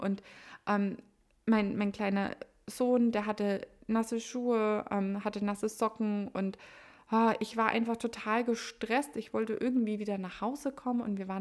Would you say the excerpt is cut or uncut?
uncut